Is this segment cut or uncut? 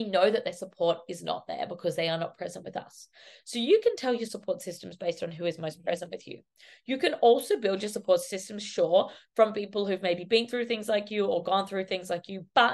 uncut